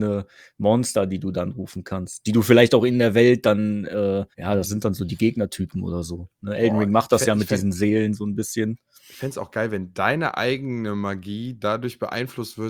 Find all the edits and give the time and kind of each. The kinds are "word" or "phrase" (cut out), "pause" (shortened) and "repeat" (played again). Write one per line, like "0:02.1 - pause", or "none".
0:04.3 - pause